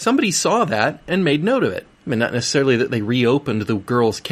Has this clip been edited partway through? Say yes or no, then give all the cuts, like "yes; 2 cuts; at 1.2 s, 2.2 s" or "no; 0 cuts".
yes; 1 cut; at 1.9 s